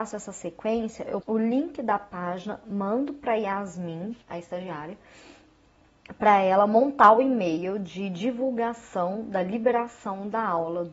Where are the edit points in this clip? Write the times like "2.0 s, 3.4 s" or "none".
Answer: 1.2 s, 4.2 s